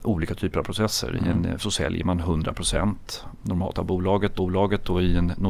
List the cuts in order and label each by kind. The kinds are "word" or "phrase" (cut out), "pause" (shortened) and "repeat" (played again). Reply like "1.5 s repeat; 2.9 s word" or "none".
1.6 s word; 3.4 s word; 3.7 s word; 4.4 s repeat